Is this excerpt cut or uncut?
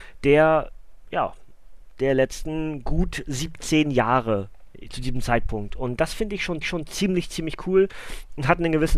cut